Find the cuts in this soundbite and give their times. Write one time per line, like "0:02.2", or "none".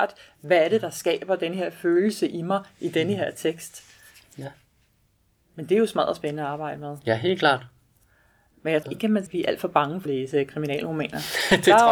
0:08.8
0:09.3
0:10.1